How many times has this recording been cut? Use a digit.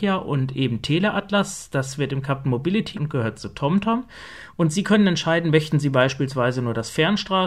1